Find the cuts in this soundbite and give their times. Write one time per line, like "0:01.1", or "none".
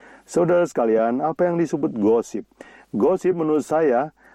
none